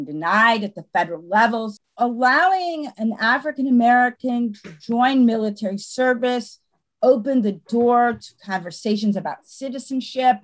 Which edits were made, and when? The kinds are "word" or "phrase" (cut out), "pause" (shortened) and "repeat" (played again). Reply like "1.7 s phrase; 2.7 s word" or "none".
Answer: none